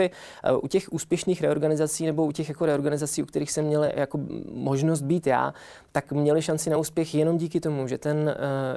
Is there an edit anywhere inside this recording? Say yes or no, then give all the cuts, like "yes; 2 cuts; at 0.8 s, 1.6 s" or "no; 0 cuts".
no; 0 cuts